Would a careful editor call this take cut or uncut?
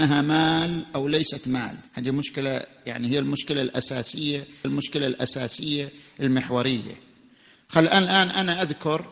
cut